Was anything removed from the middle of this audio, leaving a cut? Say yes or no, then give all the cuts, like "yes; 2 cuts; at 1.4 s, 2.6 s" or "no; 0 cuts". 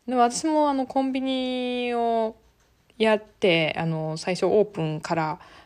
no; 0 cuts